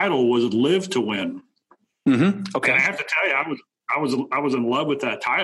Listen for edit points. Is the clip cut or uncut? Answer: uncut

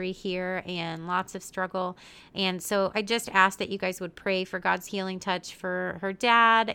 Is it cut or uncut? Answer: uncut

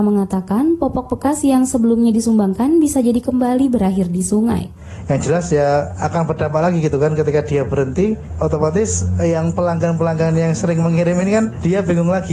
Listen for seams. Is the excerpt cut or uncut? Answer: uncut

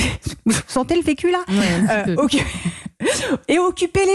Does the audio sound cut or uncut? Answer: uncut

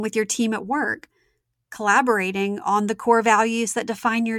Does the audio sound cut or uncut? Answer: uncut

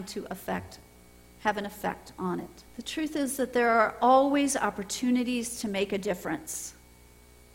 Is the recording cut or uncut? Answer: cut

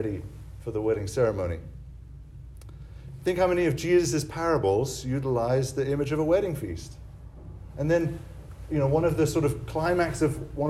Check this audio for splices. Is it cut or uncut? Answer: uncut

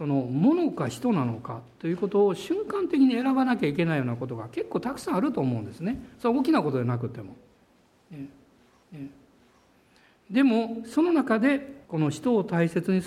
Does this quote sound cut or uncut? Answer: cut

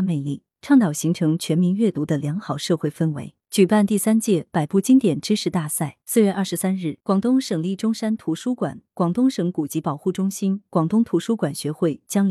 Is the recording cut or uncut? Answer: cut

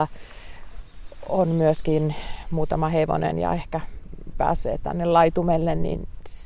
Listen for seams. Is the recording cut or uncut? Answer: cut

